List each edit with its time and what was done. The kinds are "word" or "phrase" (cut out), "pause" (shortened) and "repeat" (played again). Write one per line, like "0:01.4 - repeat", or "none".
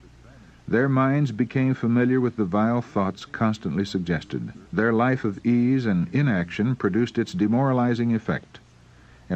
0:04.7 - pause